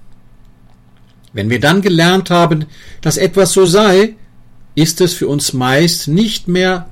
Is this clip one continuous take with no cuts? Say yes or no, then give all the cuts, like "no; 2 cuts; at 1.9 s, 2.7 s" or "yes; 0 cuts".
yes; 0 cuts